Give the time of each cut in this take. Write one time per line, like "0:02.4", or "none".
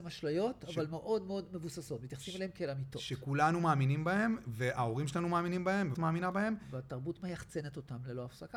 0:05.9